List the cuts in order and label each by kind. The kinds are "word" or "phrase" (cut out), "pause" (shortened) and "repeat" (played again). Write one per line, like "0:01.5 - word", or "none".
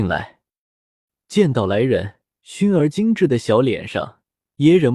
0:02.2 - pause